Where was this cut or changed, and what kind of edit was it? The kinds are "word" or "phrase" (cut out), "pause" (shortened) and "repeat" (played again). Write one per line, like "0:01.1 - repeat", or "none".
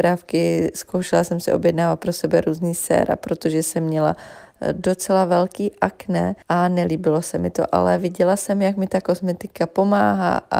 0:06.4 - pause